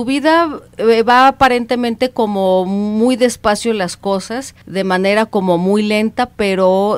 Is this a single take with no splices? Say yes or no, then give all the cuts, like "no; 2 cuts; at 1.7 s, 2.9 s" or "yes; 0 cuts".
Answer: no; 1 cut; at 4.6 s